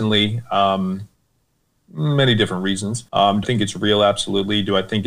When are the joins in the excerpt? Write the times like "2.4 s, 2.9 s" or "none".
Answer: 1.8 s, 3.1 s, 3.4 s